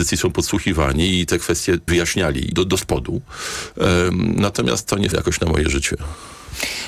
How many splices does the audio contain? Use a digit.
3